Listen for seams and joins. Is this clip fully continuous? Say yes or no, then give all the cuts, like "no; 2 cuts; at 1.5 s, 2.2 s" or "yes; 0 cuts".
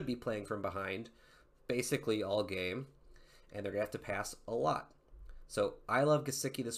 yes; 0 cuts